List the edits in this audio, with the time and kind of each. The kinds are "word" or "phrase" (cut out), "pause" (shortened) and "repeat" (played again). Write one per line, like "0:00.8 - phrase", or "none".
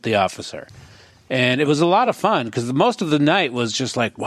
none